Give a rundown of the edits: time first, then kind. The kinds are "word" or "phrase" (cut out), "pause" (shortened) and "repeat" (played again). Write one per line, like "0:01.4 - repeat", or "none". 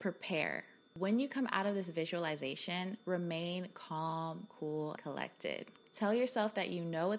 0:05.0 - word